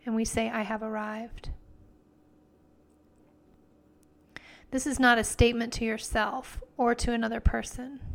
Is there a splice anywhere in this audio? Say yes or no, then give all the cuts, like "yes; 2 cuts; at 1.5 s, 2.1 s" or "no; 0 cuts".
no; 0 cuts